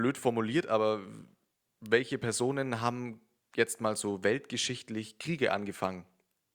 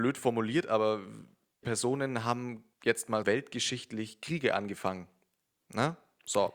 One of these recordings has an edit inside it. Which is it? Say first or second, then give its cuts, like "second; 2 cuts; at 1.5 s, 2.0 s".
second; 3 cuts; at 1.6 s, 2.7 s, 3.2 s